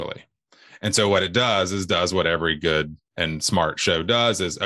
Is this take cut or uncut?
cut